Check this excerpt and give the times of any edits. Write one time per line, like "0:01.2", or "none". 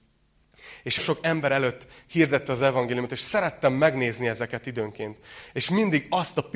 0:01.0